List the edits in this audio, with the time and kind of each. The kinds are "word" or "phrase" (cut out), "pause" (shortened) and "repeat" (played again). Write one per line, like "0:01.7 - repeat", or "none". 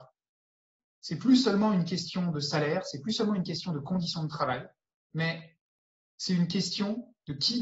0:04.9 - pause